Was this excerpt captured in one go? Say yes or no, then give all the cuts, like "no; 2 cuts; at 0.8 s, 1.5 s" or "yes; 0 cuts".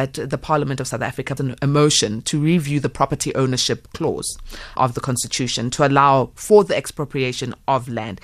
no; 2 cuts; at 1.4 s, 4.8 s